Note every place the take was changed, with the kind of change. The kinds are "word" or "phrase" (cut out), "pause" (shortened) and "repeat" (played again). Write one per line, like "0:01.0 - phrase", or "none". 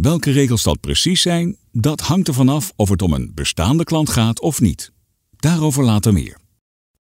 none